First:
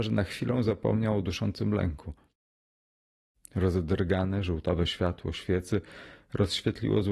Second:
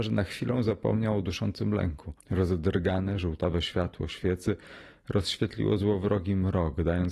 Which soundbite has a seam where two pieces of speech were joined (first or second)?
second